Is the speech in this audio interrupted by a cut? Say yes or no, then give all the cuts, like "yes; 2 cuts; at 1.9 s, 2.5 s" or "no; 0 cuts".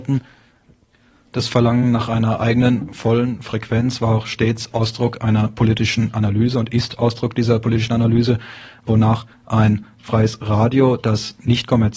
no; 0 cuts